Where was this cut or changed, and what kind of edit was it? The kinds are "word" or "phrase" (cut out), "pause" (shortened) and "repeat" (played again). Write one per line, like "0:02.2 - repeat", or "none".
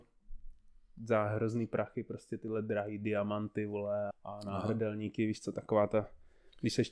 0:04.1 - word